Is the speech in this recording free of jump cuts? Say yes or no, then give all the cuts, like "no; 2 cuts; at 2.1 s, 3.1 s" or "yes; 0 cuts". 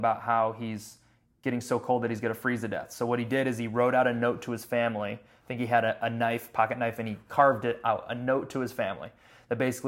yes; 0 cuts